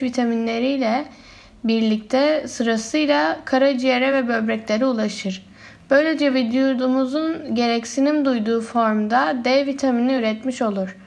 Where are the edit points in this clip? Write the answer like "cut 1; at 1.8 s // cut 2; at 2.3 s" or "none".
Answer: none